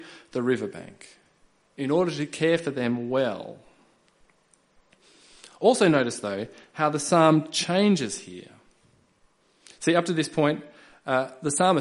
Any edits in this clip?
no; 0 cuts

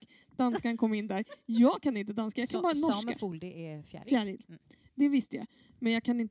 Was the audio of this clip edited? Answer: no; 0 cuts

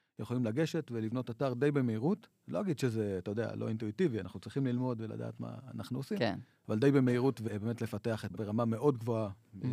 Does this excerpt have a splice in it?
yes; 1 cut; at 8.3 s

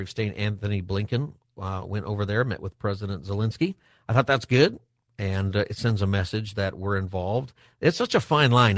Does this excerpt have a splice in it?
no; 0 cuts

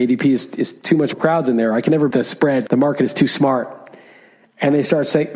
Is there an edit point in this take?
yes; 3 cuts; at 1.1 s, 2.1 s, 2.7 s

